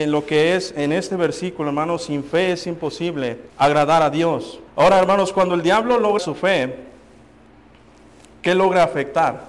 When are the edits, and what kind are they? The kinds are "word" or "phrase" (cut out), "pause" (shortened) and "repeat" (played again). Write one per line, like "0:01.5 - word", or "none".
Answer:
0:03.5 - pause
0:04.7 - pause
0:06.2 - word